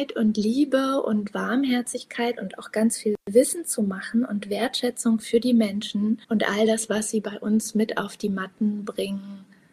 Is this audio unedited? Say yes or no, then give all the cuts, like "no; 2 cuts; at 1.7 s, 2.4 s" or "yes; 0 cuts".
no; 1 cut; at 6.2 s